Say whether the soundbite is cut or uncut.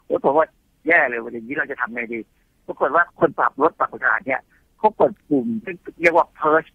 uncut